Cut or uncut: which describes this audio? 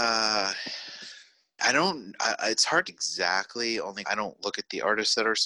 cut